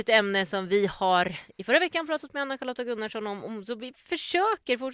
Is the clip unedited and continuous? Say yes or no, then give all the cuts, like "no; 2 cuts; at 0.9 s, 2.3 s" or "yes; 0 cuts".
yes; 0 cuts